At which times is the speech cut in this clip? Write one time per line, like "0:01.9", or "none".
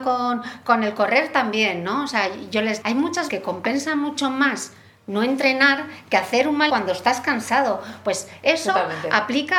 0:02.8
0:03.3
0:06.7